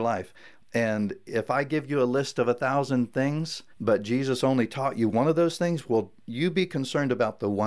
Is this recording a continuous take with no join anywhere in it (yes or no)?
no